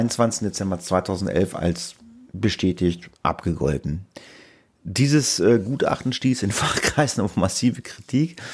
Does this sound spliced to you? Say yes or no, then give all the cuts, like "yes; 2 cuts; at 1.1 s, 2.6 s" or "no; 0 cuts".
yes; 1 cut; at 3.1 s